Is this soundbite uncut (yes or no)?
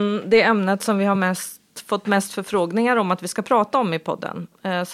yes